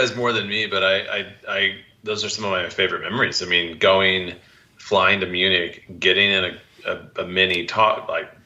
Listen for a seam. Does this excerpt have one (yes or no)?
no